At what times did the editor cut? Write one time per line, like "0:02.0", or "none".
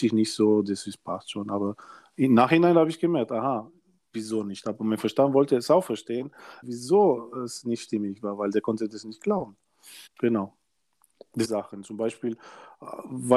0:06.6
0:10.1
0:11.4